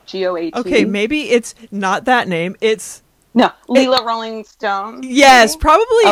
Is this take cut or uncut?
uncut